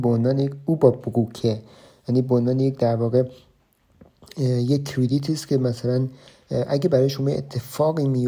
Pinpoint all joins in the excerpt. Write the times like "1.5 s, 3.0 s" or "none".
none